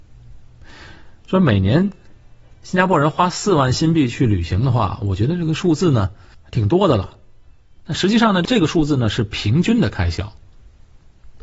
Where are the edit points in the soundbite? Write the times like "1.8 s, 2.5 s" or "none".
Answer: none